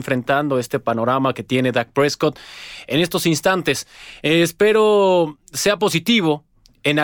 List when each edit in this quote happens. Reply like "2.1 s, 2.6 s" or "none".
none